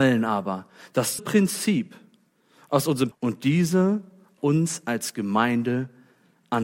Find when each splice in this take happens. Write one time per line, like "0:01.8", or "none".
0:01.2
0:03.1
0:04.4